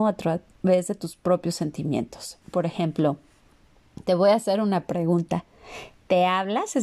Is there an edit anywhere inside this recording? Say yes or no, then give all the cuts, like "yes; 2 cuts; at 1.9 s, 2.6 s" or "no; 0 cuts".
yes; 1 cut; at 2.4 s